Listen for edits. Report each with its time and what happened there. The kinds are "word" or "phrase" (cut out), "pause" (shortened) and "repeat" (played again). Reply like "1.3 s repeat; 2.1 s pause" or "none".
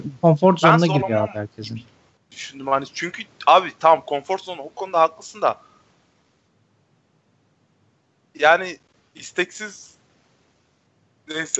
2.1 s pause; 9.0 s pause